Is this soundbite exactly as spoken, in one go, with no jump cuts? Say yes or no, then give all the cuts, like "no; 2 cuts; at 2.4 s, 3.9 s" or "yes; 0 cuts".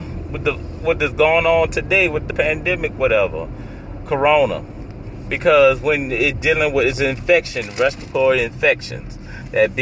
no; 2 cuts; at 2.3 s, 4.1 s